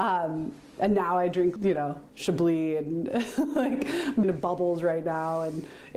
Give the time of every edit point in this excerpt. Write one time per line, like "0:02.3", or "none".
0:01.6
0:02.1
0:04.2